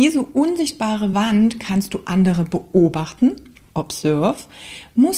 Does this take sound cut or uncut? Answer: uncut